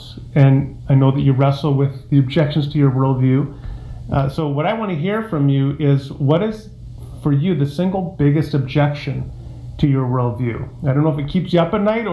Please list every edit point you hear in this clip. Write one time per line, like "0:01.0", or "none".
none